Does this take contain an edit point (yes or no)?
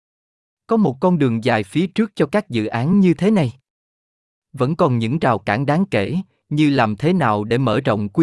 no